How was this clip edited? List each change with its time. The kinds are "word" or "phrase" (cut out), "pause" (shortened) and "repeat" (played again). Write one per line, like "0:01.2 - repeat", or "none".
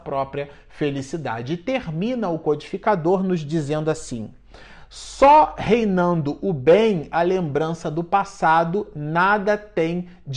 none